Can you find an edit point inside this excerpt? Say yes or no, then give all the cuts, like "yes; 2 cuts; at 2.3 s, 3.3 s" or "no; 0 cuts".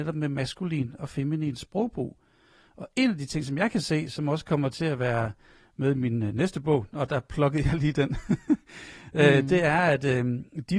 no; 0 cuts